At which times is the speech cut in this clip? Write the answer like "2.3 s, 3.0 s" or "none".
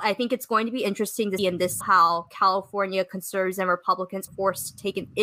1.4 s, 1.8 s, 4.3 s